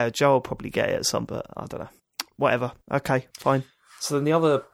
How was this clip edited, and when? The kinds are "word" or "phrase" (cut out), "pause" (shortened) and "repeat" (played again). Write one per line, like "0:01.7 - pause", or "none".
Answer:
0:01.3 - word